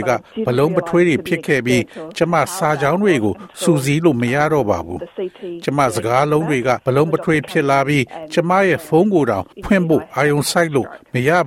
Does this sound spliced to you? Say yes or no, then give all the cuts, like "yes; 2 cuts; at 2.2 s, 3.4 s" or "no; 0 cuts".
yes; 2 cuts; at 6.8 s, 9.5 s